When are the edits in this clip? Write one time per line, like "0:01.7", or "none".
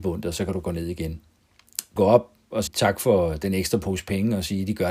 0:02.0
0:02.7